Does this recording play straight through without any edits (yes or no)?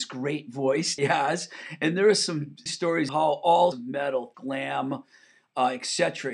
no